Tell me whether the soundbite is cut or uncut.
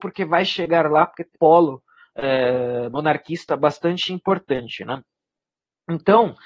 cut